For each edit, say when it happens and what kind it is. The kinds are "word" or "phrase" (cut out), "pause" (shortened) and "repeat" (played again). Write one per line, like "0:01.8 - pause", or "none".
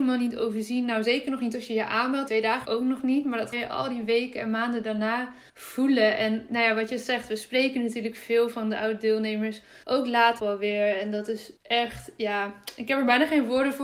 0:02.3 - phrase
0:02.6 - word
0:03.5 - word
0:05.5 - pause
0:09.8 - pause
0:10.4 - word
0:11.6 - pause